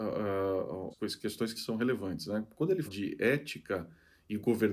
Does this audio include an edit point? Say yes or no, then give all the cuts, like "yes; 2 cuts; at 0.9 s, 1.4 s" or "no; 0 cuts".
yes; 3 cuts; at 0.9 s, 1.6 s, 2.9 s